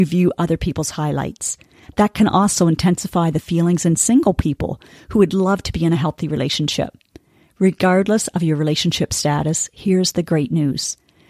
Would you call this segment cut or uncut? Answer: uncut